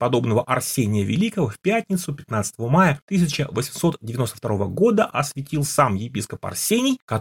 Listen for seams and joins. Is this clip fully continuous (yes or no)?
yes